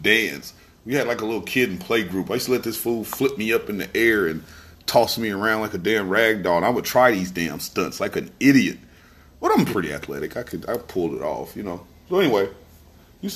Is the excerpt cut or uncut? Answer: uncut